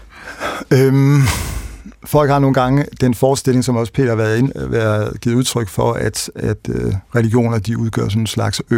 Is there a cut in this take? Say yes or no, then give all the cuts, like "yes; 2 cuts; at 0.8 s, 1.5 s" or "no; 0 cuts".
yes; 2 cuts; at 1.9 s, 7.1 s